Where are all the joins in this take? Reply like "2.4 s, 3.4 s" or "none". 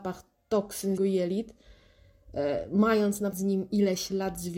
1.0 s, 3.3 s